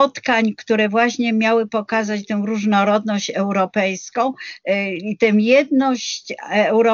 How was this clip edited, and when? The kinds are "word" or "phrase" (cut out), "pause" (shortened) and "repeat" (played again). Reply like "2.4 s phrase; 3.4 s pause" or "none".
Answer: none

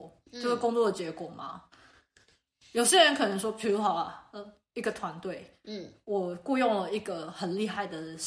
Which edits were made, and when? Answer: none

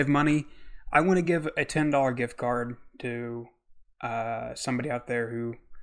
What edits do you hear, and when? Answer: none

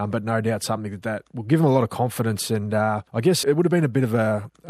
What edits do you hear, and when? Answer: 3.1 s pause; 3.4 s word

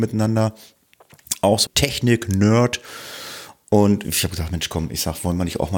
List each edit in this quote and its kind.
1.7 s word

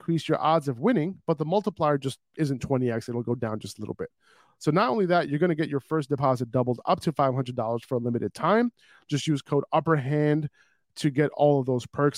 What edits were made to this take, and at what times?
none

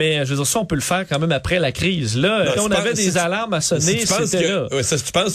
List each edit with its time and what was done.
2.6 s word

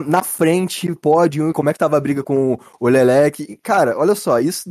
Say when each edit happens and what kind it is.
1.0 s word; 1.5 s phrase; 2.2 s word

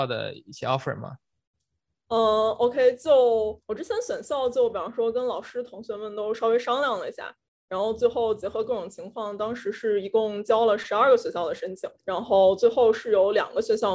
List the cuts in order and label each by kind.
3.6 s pause; 12.0 s pause

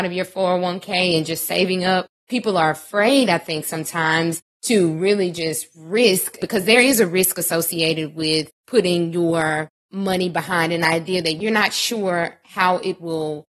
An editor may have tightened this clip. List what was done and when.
none

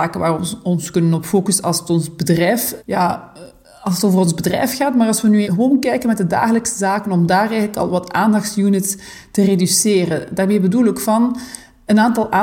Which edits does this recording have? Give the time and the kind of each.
2.8 s word; 5.4 s word

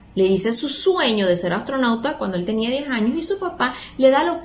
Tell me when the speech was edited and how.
none

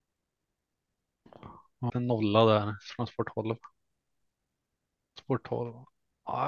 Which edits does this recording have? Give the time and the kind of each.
1.9 s word

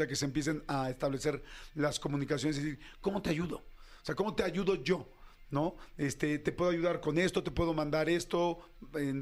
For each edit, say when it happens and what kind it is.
none

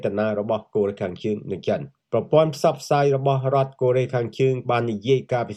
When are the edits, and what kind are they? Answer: 4.6 s word

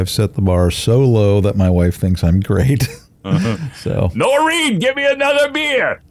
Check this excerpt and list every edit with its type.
3.0 s pause

